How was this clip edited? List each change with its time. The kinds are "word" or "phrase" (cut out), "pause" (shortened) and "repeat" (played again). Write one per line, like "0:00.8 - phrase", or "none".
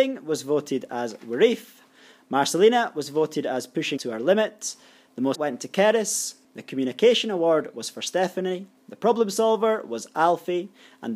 0:04.0 - word
0:05.3 - word